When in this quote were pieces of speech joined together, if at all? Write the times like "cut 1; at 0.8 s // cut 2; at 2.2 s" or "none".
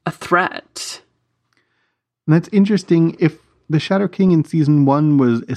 none